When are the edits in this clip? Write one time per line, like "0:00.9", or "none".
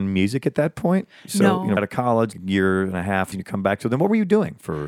0:01.8
0:02.3
0:03.3